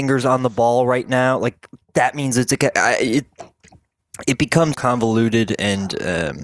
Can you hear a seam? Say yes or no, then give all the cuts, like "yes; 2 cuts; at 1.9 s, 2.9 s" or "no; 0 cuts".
yes; 2 cuts; at 2.7 s, 4.7 s